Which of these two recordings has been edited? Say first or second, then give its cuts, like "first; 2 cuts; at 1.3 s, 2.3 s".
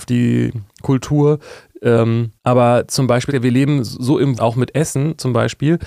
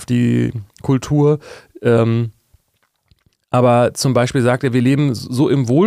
first; 3 cuts; at 2.4 s, 3.3 s, 4.4 s